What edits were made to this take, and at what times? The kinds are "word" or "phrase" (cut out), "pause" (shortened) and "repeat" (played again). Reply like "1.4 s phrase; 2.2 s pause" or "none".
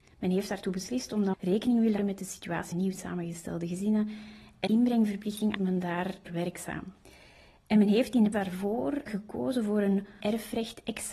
1.3 s word; 2.0 s word; 2.7 s word; 4.7 s word; 5.6 s word; 6.3 s word; 8.3 s word; 9.1 s word; 10.2 s word

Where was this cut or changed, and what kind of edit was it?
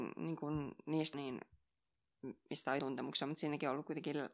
1.1 s word; 2.8 s word

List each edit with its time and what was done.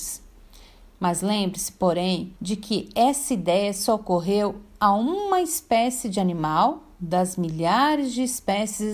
2.4 s pause

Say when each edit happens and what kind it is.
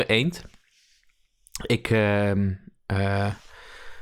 none

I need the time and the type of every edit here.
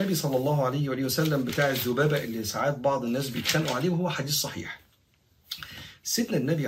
none

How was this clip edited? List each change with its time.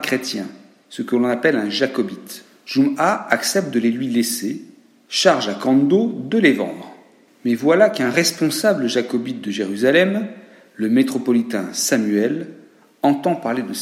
none

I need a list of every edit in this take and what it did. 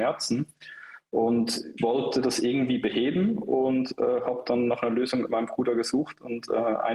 1.8 s word

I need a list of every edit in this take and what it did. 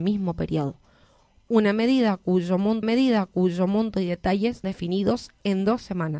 2.8 s repeat; 4.6 s word

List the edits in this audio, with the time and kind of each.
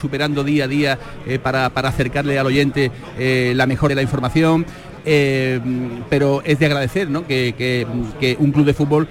3.9 s phrase

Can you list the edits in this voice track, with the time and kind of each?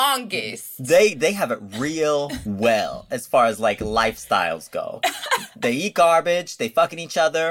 none

